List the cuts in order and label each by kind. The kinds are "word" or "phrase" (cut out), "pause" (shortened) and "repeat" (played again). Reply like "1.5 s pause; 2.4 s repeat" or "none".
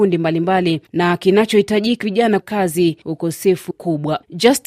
2.0 s word; 2.4 s word; 3.7 s phrase